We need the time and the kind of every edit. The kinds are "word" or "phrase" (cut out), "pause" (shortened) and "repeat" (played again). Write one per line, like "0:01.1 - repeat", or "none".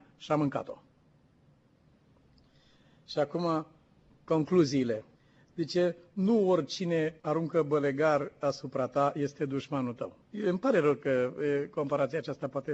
0:05.1 - pause
0:07.2 - pause
0:10.2 - pause